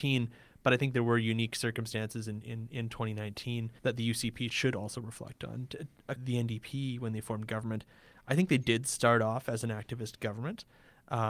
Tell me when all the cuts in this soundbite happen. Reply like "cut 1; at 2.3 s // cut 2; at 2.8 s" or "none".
cut 1; at 3.8 s // cut 2; at 4.5 s // cut 3; at 6.2 s